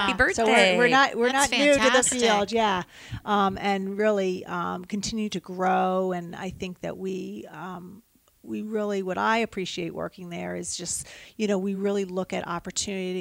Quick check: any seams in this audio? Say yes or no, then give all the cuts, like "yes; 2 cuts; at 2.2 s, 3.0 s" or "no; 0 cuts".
no; 0 cuts